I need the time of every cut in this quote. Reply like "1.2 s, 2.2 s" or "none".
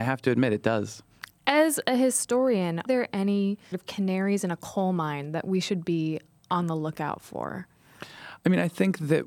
2.9 s, 3.7 s